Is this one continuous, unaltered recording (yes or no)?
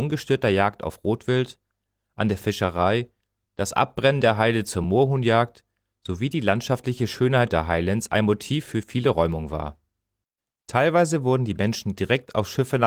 yes